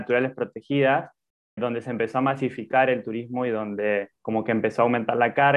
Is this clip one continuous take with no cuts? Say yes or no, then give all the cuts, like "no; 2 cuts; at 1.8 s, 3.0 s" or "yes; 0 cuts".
no; 2 cuts; at 1.6 s, 4.1 s